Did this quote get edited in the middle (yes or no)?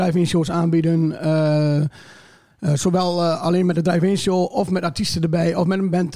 no